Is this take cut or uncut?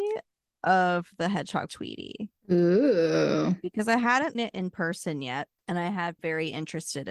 cut